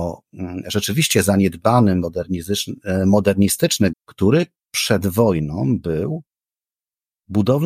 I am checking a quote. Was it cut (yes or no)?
yes